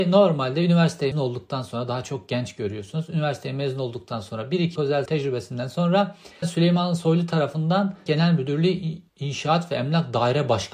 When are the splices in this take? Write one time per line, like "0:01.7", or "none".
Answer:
0:01.1
0:04.8
0:05.1
0:06.4
0:08.1
0:09.1